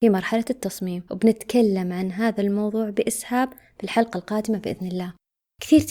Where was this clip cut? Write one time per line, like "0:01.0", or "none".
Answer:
none